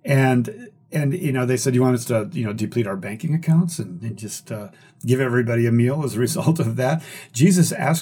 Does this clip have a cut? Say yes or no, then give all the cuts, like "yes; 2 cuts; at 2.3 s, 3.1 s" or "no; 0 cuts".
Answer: no; 0 cuts